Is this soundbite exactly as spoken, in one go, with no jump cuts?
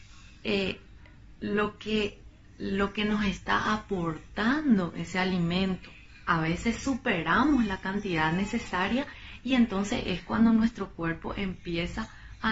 yes; 0 cuts

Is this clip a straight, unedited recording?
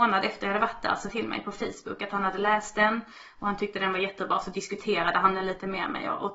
no; 1 cut; at 1.1 s

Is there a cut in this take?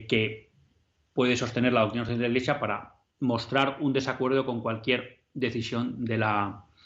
no; 0 cuts

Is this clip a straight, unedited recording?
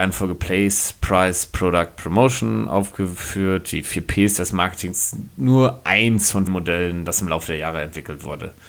no; 1 cut; at 6.5 s

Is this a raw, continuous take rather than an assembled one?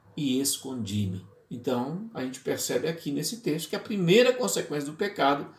no; 1 cut; at 1.3 s

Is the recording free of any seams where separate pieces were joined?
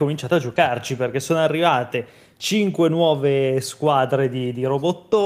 yes; 0 cuts

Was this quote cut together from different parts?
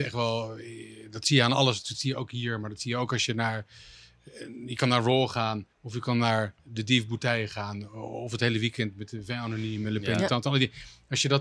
yes; 2 cuts; at 5.7 s, 6.6 s

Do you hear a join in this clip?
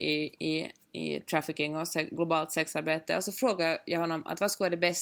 no; 0 cuts

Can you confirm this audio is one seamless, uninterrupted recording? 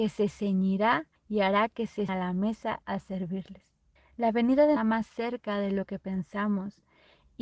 no; 5 cuts; at 1.2 s, 2.1 s, 2.8 s, 4.0 s, 4.8 s

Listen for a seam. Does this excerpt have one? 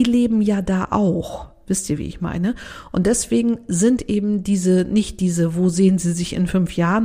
no; 0 cuts

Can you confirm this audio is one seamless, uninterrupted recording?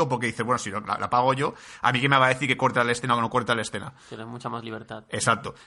yes; 0 cuts

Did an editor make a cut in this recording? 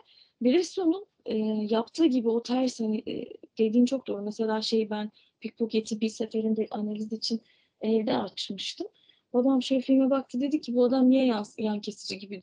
no; 0 cuts

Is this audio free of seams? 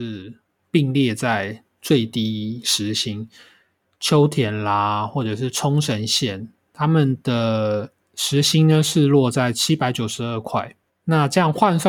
yes; 0 cuts

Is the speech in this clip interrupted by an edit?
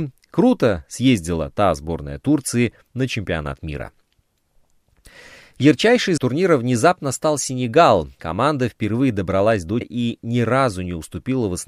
yes; 3 cuts; at 6.2 s, 8.1 s, 9.8 s

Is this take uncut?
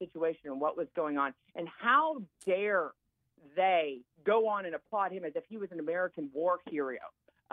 no; 1 cut; at 4.1 s

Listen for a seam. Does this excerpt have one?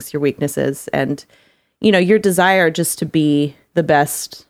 no; 0 cuts

